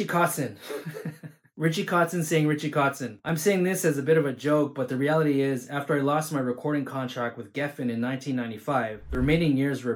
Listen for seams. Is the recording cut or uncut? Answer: uncut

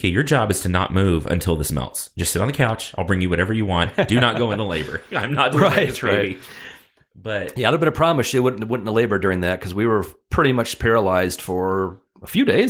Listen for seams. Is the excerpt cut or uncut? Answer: uncut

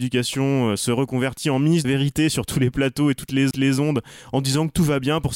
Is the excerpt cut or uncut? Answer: cut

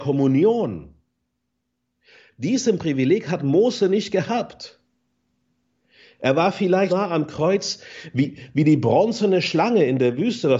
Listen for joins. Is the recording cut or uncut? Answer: cut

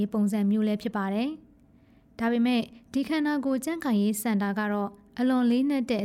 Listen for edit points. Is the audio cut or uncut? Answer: uncut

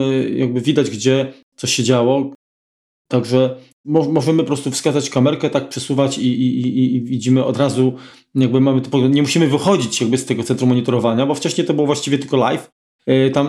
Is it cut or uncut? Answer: uncut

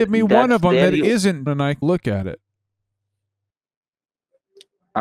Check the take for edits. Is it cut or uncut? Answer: cut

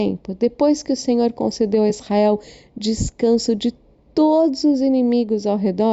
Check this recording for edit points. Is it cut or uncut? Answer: uncut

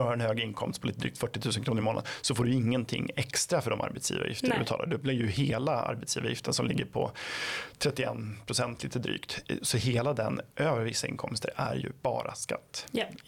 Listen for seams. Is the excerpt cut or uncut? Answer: uncut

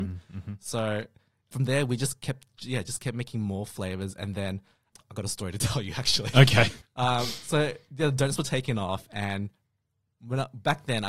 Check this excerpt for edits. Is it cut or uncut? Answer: uncut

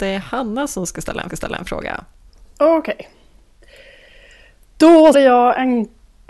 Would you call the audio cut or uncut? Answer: cut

